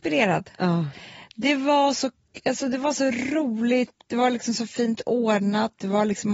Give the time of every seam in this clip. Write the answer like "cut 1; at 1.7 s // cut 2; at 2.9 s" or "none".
none